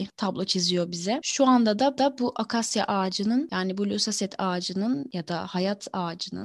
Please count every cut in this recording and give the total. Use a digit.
1